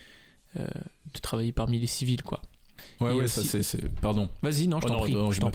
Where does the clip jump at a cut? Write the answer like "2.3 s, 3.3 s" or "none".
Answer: none